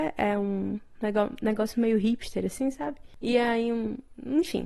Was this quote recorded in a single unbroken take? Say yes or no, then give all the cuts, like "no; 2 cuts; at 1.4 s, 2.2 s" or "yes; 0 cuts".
yes; 0 cuts